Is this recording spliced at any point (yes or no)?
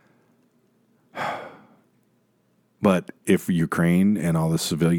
yes